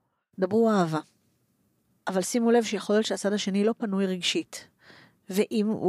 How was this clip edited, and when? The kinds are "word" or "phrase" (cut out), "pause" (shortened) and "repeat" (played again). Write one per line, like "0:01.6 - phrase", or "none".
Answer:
none